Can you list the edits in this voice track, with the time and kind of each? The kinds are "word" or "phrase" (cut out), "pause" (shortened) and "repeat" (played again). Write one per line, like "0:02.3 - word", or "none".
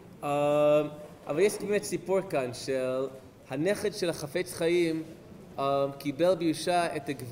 0:01.6 - word